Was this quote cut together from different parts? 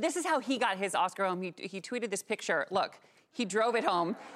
no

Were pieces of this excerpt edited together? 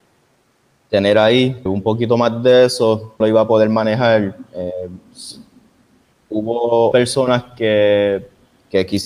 yes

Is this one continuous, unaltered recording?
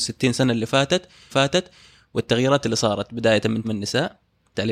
no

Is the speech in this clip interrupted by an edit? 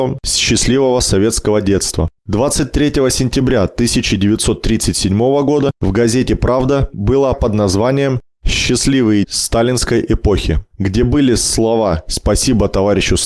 yes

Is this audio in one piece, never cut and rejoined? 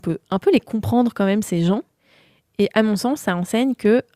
yes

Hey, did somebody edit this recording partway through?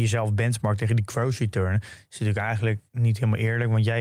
yes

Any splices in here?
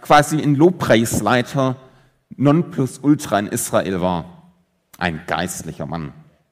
no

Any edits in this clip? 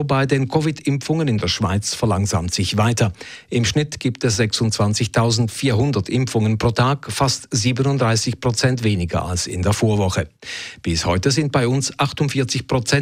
no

